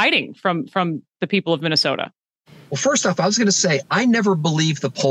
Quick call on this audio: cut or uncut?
uncut